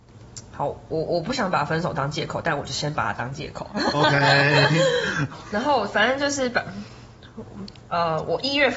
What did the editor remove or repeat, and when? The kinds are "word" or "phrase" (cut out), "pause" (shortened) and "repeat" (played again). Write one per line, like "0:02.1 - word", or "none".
0:05.3 - word

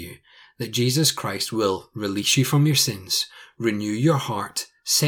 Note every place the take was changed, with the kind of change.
none

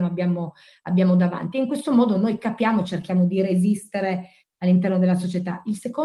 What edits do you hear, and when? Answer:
none

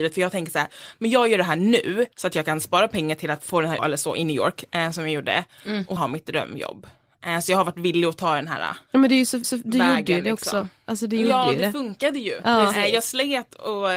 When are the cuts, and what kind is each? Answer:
0:02.1 - pause
0:03.8 - phrase
0:06.0 - phrase
0:08.9 - pause
0:09.4 - repeat

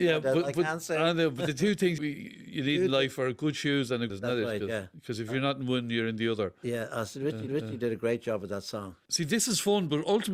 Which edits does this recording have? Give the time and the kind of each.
0:02.0 - word
0:04.1 - phrase
0:07.5 - repeat

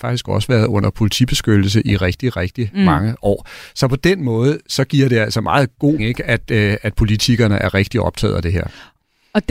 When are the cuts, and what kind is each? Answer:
0:06.0 - word

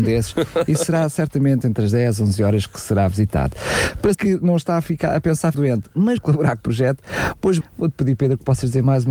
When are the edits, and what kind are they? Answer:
0:04.1 - word
0:05.5 - word
0:06.2 - word
0:06.6 - word
0:07.6 - word

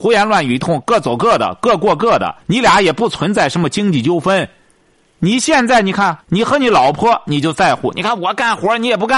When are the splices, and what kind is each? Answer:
0:02.4 - pause
0:06.2 - pause

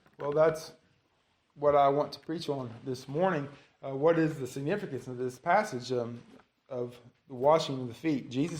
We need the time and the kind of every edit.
none

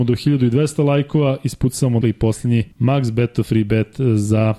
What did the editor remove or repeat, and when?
0:02.0 - word
0:02.7 - pause

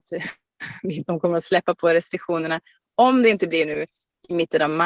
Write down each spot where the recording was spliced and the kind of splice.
none

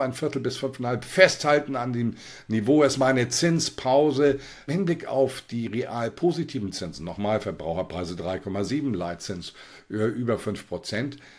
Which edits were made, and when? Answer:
0:04.7 - word

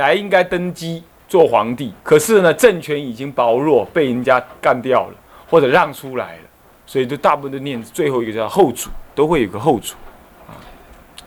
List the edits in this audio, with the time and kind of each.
0:02.0 - pause

